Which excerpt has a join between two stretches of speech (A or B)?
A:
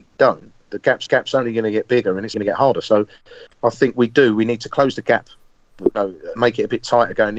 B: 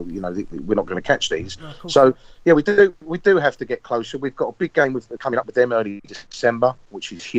A